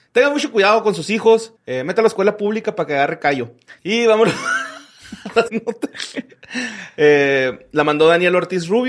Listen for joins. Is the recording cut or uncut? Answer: cut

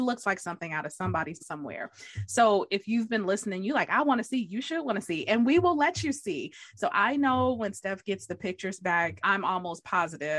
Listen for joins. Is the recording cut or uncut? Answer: cut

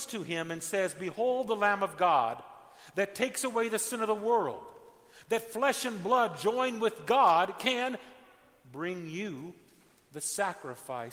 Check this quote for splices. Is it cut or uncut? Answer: uncut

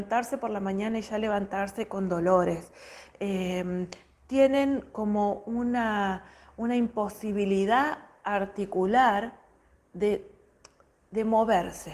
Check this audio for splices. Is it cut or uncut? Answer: uncut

